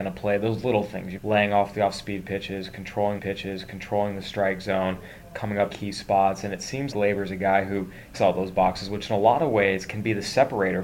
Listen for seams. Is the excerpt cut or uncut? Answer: cut